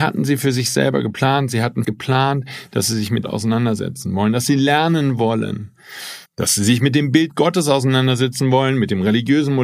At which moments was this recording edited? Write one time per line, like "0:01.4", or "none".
0:01.8
0:03.2
0:06.3